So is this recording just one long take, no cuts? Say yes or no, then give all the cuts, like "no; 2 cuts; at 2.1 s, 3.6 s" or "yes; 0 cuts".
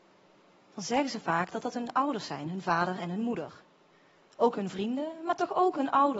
yes; 0 cuts